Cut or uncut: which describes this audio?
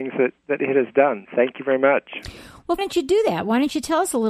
cut